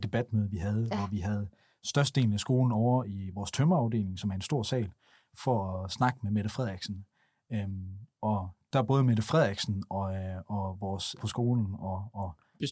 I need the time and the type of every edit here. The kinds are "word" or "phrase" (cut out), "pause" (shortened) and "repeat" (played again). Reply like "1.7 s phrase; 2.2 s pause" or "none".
11.2 s word